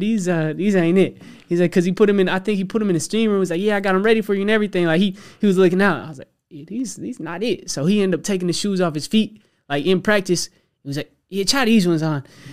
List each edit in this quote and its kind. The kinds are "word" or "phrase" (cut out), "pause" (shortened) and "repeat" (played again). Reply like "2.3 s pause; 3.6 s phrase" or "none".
none